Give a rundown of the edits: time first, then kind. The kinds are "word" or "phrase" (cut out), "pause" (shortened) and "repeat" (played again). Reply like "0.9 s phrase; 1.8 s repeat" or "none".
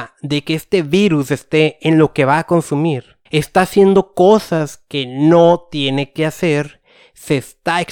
3.3 s pause